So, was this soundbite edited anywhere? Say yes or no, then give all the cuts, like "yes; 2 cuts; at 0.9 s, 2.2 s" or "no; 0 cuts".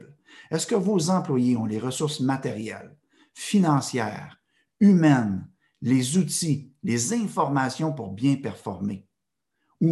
no; 0 cuts